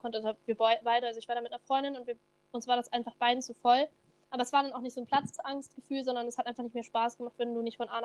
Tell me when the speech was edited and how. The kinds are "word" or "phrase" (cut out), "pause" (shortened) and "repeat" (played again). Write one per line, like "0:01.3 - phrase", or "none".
none